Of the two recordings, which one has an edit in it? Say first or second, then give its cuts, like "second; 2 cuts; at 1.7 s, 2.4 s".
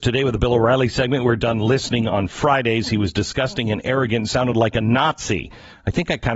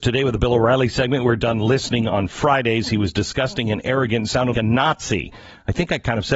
second; 1 cut; at 4.5 s